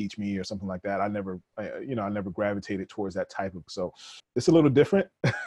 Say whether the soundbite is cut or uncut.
cut